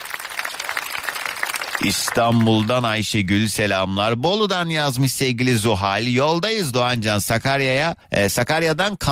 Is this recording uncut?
no; 1 cut; at 8.0 s

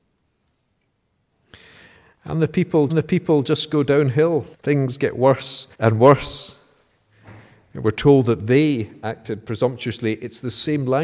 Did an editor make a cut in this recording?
yes; 3 cuts; at 2.9 s, 4.5 s, 5.7 s

